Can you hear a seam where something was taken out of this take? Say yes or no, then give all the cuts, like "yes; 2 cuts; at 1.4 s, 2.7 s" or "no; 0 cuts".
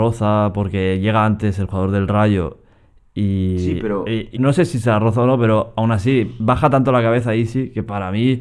yes; 1 cut; at 4.4 s